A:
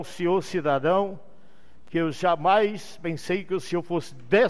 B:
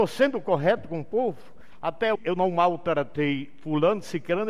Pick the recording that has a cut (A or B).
B